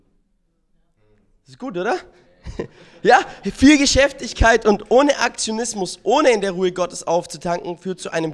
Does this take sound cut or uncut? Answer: uncut